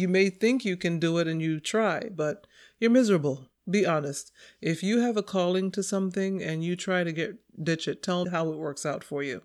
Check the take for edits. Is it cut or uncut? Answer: cut